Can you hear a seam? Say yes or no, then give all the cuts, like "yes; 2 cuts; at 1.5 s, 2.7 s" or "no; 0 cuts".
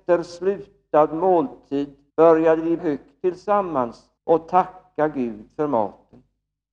yes; 3 cuts; at 2.1 s, 2.8 s, 4.2 s